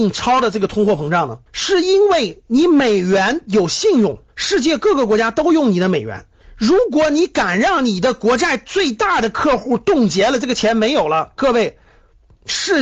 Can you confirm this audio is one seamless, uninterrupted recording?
no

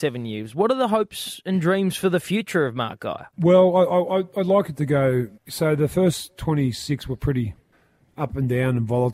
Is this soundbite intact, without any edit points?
no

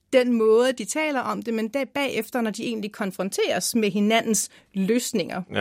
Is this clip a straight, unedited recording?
yes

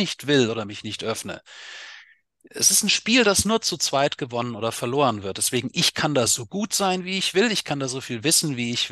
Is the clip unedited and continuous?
yes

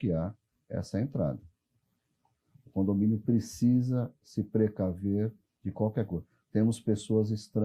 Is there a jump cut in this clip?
no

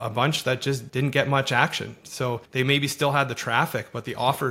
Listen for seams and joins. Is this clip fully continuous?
no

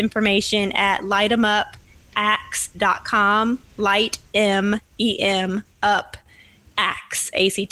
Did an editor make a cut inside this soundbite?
no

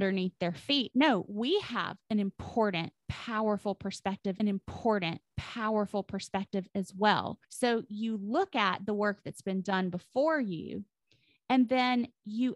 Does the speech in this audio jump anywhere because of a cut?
yes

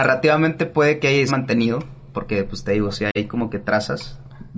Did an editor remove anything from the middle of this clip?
yes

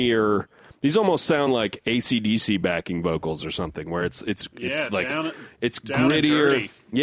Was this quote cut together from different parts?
no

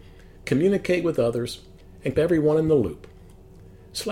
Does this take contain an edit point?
yes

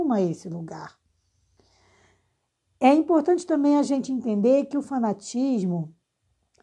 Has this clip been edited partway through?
no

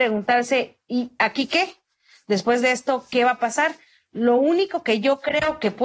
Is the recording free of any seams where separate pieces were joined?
yes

